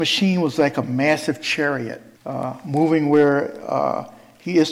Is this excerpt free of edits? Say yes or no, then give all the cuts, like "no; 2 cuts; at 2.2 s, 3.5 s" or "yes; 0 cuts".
no; 1 cut; at 2.2 s